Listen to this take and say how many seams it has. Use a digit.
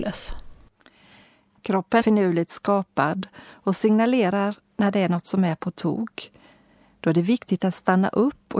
1